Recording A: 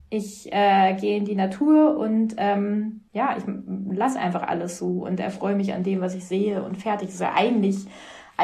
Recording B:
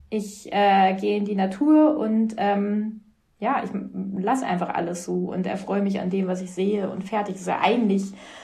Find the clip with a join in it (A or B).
A